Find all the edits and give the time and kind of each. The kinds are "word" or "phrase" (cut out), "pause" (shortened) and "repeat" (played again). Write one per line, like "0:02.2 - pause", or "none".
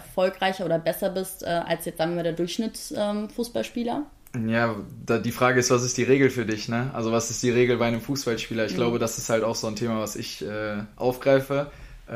none